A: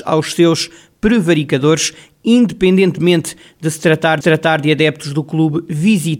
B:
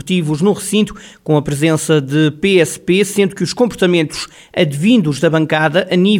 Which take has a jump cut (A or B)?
A